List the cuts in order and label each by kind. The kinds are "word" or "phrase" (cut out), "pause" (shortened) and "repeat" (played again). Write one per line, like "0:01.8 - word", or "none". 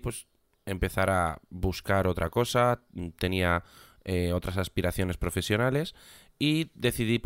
none